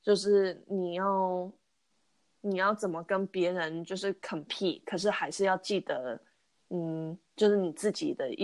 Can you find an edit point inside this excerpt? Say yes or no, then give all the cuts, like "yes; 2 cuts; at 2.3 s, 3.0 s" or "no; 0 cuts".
no; 0 cuts